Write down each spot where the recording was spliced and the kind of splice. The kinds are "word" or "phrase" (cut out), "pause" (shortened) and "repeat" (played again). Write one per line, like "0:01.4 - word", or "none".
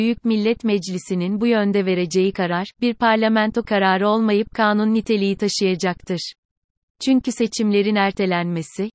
none